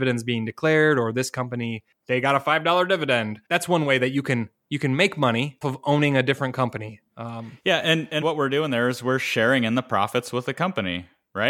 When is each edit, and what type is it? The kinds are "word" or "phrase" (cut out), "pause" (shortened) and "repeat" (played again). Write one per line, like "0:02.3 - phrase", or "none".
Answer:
0:03.4 - pause
0:05.6 - word
0:08.2 - word